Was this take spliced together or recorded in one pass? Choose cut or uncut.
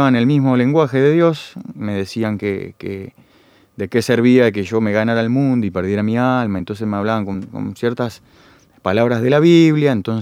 uncut